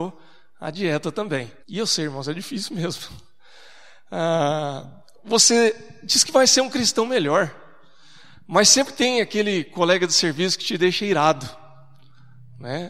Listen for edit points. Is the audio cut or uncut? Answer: cut